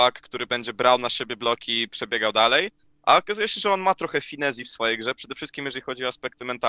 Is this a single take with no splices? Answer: yes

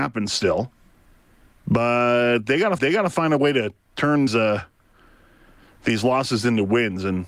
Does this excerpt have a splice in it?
yes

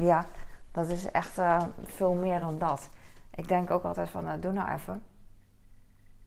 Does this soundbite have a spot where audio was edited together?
no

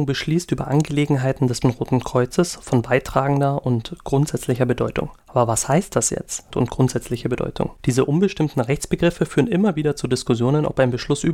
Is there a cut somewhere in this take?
yes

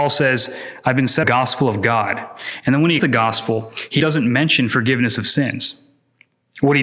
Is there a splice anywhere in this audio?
yes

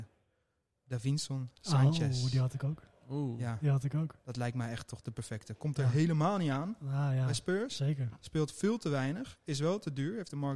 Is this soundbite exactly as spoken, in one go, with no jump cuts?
yes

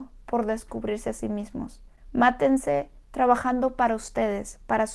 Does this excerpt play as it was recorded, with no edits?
yes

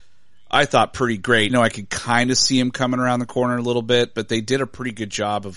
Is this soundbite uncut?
no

